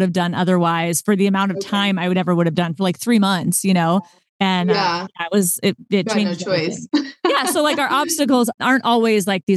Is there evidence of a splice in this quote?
no; 0 cuts

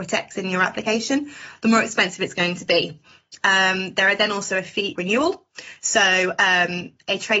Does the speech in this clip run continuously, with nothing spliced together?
no; 1 cut; at 5.0 s

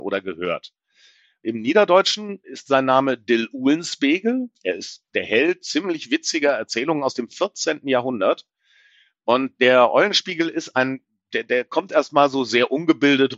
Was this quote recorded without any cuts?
yes; 0 cuts

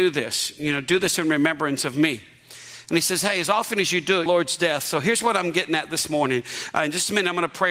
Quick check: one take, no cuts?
no; 1 cut; at 4.3 s

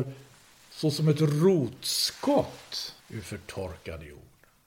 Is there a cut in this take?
yes; 1 cut; at 3.0 s

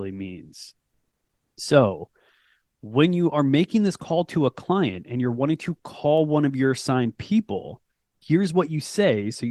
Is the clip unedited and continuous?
yes; 0 cuts

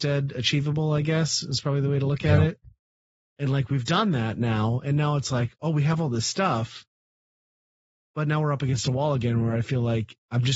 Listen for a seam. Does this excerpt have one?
no; 0 cuts

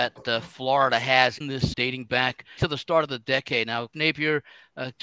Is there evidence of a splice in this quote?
yes; 4 cuts; at 1.4 s, 1.7 s, 2.6 s, 3.9 s

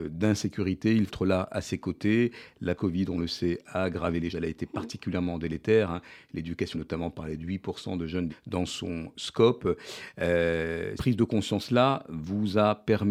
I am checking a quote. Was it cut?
yes; 6 cuts; at 1.1 s, 2.8 s, 4.3 s, 6.7 s, 8.3 s, 11.0 s

